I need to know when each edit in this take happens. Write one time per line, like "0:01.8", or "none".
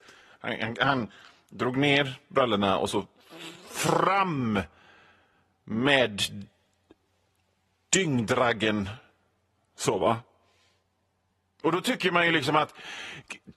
none